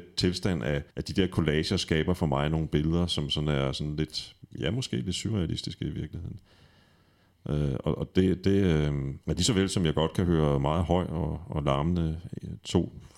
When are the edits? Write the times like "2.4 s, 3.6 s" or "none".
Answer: 0.9 s, 4.4 s, 9.2 s

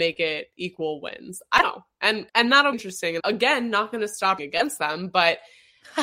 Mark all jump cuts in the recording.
1.6 s, 2.3 s, 2.7 s, 3.2 s, 4.4 s

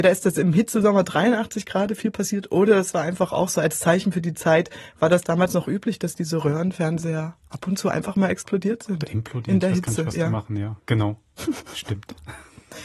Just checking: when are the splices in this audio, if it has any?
10.8 s

